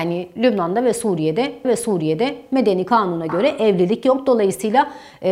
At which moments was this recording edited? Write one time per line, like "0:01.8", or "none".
0:01.6